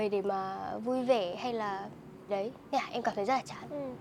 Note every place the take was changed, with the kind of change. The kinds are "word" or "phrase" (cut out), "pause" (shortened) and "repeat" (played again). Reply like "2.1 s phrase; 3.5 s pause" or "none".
2.3 s word